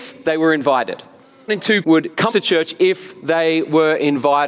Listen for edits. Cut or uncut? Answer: cut